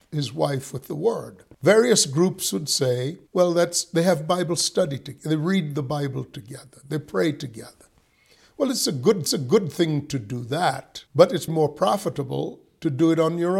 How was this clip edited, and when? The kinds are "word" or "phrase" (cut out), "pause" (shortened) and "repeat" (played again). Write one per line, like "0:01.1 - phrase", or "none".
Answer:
0:01.5 - pause
0:03.3 - pause
0:09.3 - repeat
0:11.1 - pause
0:11.5 - word